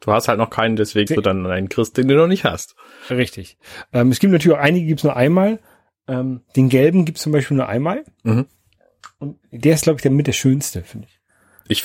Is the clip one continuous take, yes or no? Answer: no